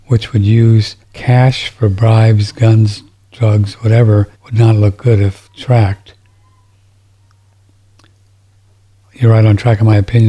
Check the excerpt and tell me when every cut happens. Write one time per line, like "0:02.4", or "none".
0:01.0
0:04.3